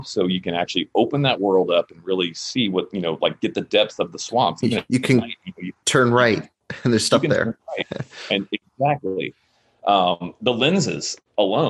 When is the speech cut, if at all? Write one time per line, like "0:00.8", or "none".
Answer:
none